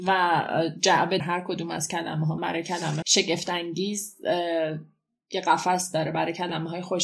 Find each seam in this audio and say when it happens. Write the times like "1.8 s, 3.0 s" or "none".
1.2 s, 2.4 s, 3.0 s